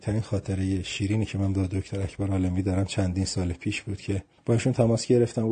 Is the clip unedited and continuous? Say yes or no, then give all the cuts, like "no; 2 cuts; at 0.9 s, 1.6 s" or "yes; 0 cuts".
yes; 0 cuts